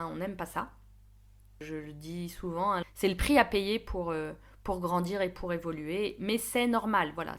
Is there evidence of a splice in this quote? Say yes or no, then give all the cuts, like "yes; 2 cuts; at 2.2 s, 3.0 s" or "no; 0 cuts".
yes; 1 cut; at 2.8 s